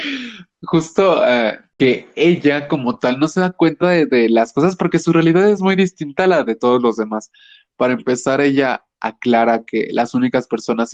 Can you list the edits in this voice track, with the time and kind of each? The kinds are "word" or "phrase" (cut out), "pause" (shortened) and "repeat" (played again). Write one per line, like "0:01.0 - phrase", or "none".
none